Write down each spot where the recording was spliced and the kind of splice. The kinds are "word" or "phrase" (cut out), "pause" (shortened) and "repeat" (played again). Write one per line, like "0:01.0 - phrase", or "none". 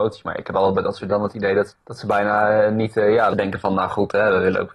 0:01.1 - word
0:01.7 - word
0:03.3 - word